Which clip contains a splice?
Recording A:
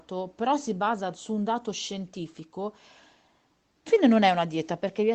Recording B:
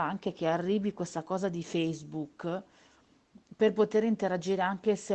A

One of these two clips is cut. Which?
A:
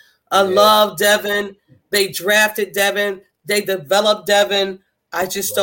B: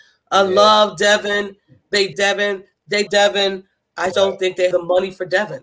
B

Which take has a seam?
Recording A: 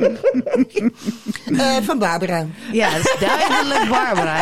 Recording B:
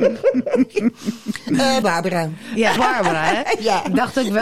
B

